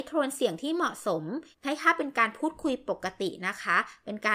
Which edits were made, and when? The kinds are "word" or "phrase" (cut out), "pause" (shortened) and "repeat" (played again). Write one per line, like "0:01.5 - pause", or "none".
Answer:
0:01.5 - pause